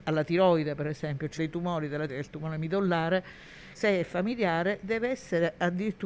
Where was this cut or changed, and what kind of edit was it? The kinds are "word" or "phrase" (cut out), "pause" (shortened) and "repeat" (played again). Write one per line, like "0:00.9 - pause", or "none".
0:01.4 - word
0:02.1 - word
0:03.7 - word